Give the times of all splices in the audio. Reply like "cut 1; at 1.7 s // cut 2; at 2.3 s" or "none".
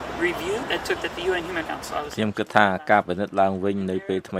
cut 1; at 1.0 s // cut 2; at 1.6 s